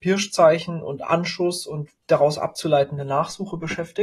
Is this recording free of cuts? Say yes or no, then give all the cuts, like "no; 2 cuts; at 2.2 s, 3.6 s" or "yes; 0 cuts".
no; 1 cut; at 2.0 s